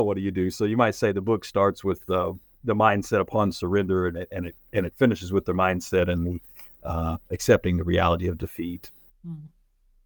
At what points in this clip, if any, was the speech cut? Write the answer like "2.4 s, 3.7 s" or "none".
6.7 s